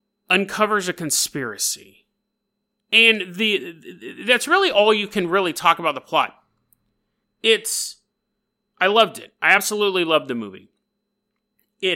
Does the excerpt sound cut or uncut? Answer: uncut